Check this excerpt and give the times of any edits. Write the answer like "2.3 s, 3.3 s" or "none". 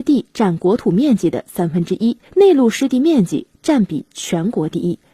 2.3 s